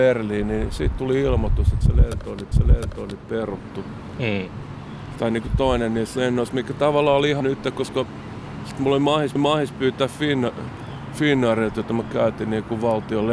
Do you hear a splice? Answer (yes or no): yes